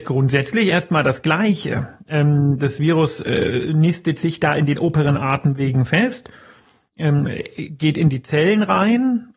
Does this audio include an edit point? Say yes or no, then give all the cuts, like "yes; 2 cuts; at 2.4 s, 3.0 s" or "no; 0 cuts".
no; 0 cuts